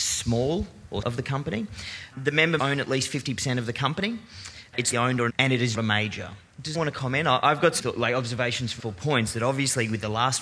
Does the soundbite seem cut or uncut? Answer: cut